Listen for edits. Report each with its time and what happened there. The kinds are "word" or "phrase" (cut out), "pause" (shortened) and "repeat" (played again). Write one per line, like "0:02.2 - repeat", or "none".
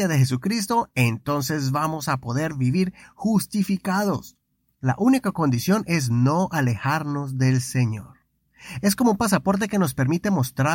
none